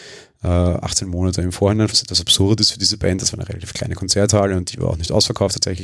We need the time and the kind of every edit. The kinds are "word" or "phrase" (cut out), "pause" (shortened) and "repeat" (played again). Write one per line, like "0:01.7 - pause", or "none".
0:01.9 - word